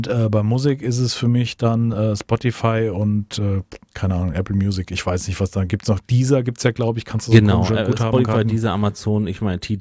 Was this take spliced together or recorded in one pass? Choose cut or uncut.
uncut